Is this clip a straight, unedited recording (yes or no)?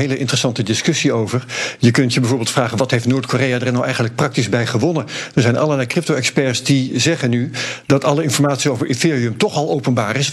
yes